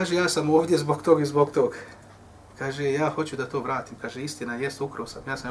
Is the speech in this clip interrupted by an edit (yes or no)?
no